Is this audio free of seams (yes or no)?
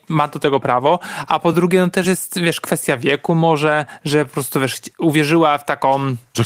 yes